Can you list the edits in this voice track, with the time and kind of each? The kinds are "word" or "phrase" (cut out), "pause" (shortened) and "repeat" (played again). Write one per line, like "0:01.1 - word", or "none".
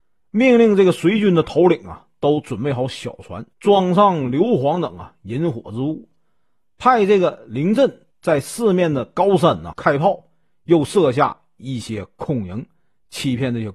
0:03.5 - pause
0:08.1 - pause
0:09.7 - word